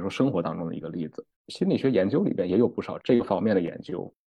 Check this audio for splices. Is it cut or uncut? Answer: cut